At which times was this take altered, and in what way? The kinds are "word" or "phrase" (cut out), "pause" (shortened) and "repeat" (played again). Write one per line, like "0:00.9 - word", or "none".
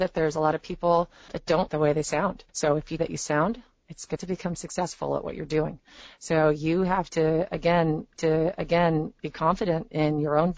0:01.3 - word
0:01.7 - word
0:02.5 - pause
0:03.0 - phrase
0:04.2 - phrase
0:08.2 - repeat

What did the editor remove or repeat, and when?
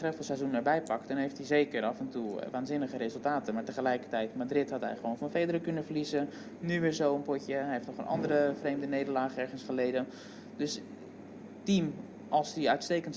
none

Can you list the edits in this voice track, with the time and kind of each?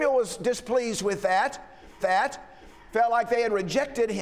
0:02.0 - repeat

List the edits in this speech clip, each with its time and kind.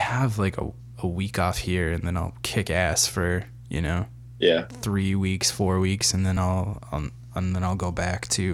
none

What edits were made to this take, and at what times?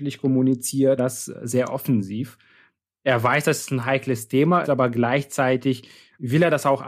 0:01.0 - word
0:04.6 - word

